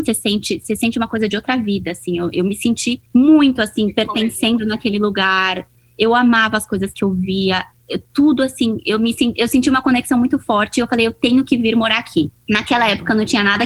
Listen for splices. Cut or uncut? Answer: uncut